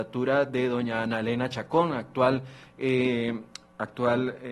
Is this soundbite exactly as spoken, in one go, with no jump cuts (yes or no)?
yes